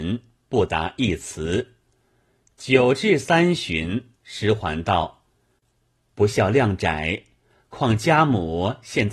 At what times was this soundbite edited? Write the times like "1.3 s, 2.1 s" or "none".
4.2 s